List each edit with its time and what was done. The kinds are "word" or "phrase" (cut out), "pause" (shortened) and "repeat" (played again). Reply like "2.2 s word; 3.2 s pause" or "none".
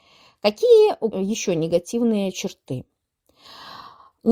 1.1 s word